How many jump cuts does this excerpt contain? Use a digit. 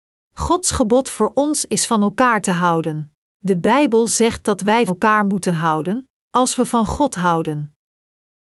2